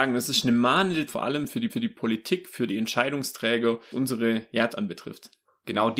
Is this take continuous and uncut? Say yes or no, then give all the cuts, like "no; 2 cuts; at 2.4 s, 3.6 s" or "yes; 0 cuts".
no; 4 cuts; at 1.1 s, 1.7 s, 3.9 s, 4.7 s